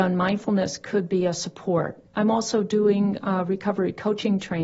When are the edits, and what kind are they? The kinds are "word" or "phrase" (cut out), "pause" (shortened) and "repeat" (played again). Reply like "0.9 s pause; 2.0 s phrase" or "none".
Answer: 2.1 s pause